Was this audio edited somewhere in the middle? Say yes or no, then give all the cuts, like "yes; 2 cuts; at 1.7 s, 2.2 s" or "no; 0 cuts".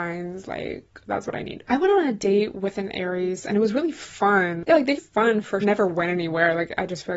yes; 2 cuts; at 5.0 s, 5.6 s